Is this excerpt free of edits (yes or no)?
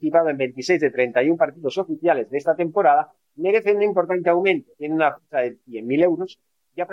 yes